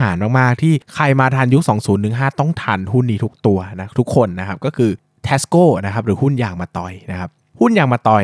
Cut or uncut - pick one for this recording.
uncut